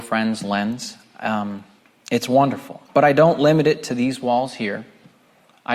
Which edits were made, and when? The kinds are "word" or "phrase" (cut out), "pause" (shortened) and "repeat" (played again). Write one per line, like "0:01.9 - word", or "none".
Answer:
0:01.8 - pause
0:02.9 - pause